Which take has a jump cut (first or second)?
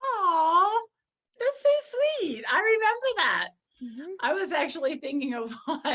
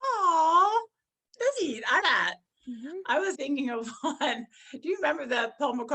second